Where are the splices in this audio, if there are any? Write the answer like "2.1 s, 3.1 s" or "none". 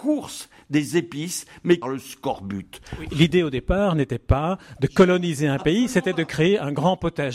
1.8 s